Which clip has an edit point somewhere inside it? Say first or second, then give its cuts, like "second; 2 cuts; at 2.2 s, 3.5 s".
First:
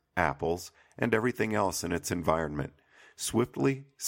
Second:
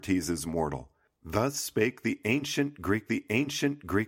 second; 1 cut; at 3.1 s